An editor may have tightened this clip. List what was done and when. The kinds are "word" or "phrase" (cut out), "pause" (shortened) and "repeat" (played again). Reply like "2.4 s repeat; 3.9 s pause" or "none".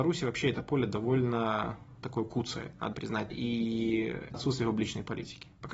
2.0 s word; 2.9 s word; 3.3 s word; 4.3 s word